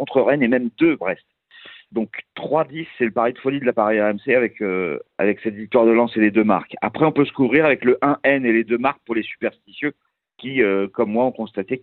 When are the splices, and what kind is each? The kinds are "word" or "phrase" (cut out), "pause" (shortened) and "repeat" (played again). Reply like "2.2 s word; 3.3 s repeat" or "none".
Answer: 1.0 s word; 3.7 s phrase; 5.1 s pause